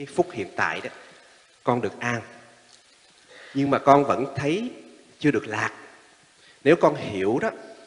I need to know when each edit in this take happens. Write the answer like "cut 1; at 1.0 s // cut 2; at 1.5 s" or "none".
none

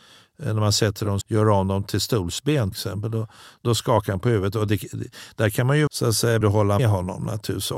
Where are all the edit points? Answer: cut 1; at 1.2 s // cut 2; at 2.7 s // cut 3; at 4.7 s // cut 4; at 5.9 s // cut 5; at 6.4 s // cut 6; at 6.8 s

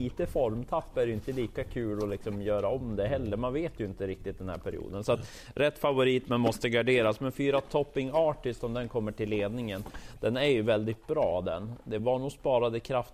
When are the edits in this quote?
none

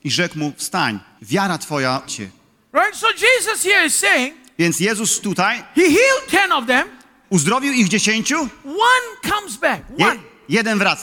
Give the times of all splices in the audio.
cut 1; at 1.2 s // cut 2; at 2.1 s // cut 3; at 5.2 s

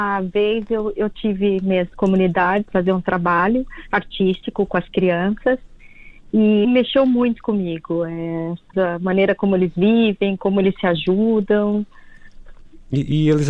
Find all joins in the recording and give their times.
cut 1; at 1.9 s // cut 2; at 2.7 s // cut 3; at 4.7 s // cut 4; at 6.6 s // cut 5; at 8.7 s

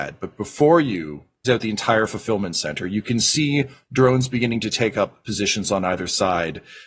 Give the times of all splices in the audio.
cut 1; at 1.4 s

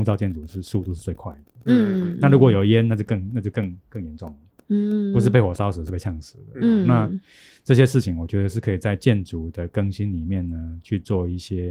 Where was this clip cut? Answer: none

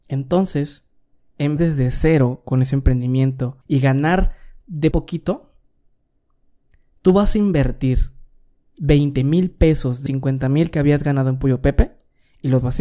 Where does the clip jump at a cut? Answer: cut 1; at 1.6 s // cut 2; at 3.6 s // cut 3; at 4.9 s // cut 4; at 10.1 s

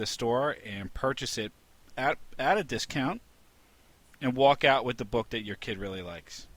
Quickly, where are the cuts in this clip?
none

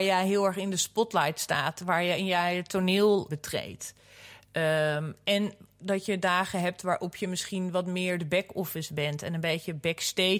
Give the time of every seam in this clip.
cut 1; at 3.3 s

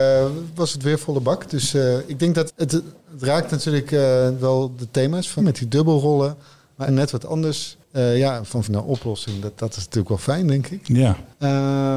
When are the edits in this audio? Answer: cut 1; at 2.5 s // cut 2; at 5.4 s // cut 3; at 6.9 s // cut 4; at 8.6 s // cut 5; at 9.6 s

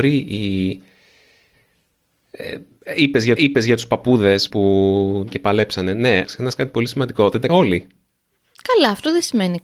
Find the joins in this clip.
cut 1; at 3.4 s // cut 2; at 4.5 s // cut 3; at 5.3 s // cut 4; at 6.2 s // cut 5; at 7.5 s

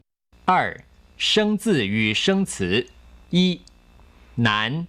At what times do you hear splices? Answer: cut 1; at 3.2 s

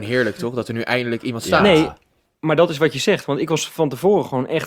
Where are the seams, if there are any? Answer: none

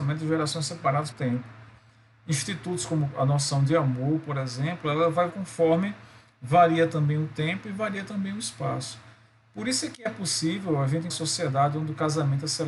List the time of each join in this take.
cut 1; at 1.1 s // cut 2; at 3.1 s // cut 3; at 5.3 s // cut 4; at 11.1 s

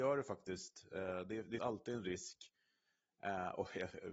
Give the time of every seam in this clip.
cut 1; at 1.6 s

